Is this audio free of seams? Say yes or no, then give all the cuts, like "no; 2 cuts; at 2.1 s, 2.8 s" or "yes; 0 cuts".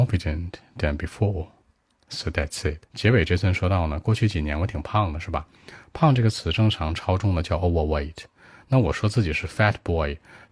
no; 1 cut; at 2.9 s